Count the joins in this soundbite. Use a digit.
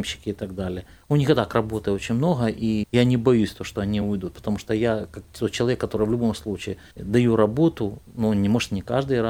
0